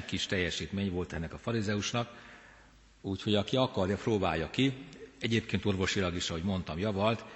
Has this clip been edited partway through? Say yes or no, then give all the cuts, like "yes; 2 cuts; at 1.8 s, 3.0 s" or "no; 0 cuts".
no; 0 cuts